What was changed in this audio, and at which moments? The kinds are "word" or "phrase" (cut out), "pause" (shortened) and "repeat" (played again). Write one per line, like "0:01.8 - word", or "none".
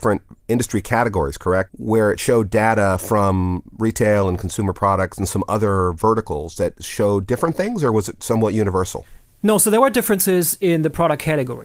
none